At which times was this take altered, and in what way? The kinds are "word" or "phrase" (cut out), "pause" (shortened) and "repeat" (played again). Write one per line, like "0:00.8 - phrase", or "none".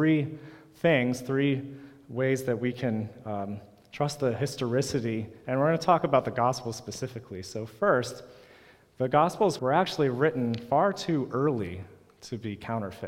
0:09.6 - word